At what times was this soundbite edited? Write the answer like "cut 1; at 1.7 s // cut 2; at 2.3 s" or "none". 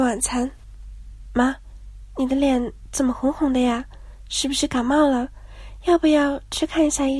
cut 1; at 1.3 s